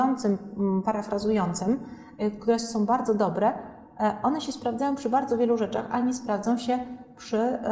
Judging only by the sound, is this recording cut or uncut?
uncut